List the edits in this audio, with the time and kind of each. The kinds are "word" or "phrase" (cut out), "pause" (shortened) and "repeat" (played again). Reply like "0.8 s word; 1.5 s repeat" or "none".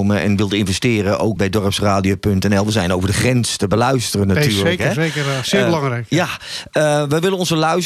1.4 s word